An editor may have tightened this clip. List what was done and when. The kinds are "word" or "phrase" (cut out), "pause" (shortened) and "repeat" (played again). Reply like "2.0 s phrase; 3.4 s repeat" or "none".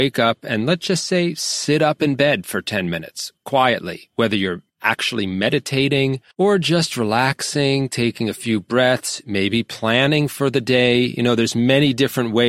4.7 s pause; 6.3 s pause